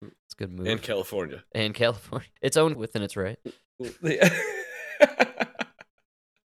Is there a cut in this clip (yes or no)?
yes